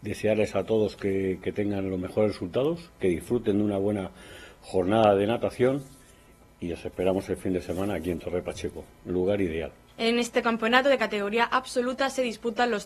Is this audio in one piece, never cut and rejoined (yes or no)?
yes